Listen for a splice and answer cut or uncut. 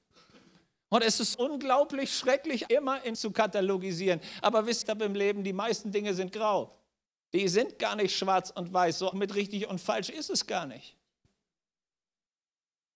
cut